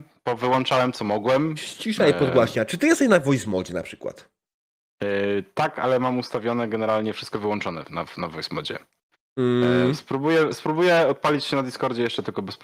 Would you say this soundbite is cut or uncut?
uncut